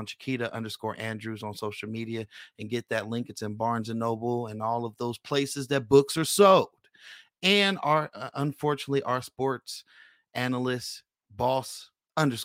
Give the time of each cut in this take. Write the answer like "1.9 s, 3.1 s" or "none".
none